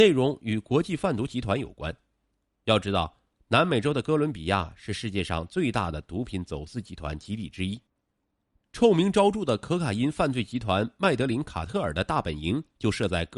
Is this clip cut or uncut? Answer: uncut